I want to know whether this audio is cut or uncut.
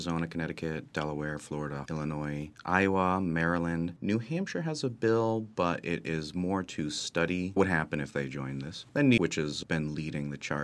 cut